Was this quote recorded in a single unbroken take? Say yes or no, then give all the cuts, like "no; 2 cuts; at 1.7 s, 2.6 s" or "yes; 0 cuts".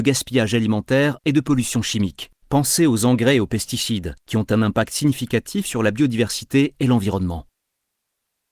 no; 2 cuts; at 2.4 s, 4.2 s